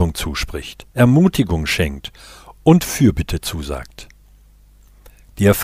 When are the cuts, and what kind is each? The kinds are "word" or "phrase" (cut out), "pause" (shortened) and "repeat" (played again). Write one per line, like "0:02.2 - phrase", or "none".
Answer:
0:00.9 - pause